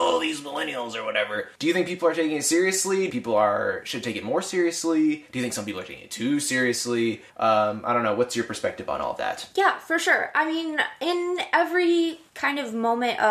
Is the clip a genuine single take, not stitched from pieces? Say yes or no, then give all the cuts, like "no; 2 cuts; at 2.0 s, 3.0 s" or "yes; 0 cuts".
no; 3 cuts; at 1.6 s, 3.1 s, 7.3 s